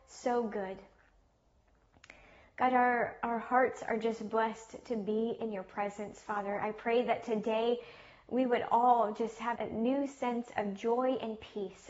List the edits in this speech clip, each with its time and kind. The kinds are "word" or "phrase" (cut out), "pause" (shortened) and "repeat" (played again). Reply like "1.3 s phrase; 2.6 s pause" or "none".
9.6 s word